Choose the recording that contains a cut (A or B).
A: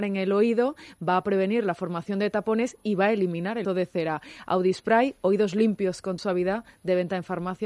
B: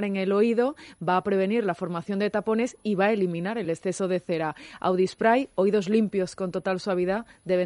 A